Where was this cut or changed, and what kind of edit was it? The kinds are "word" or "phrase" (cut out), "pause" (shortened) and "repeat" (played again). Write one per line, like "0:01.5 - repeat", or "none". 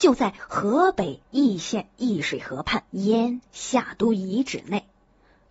0:02.9 - pause